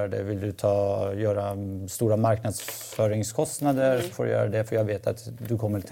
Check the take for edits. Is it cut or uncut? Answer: uncut